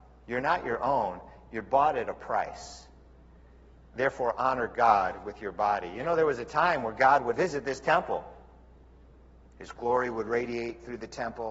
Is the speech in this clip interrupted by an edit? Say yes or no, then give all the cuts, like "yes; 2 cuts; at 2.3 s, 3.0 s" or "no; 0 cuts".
yes; 1 cut; at 7.3 s